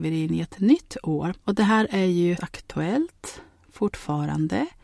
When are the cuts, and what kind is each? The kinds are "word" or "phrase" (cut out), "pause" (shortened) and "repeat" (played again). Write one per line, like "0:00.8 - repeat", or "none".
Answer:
0:01.4 - pause
0:02.4 - word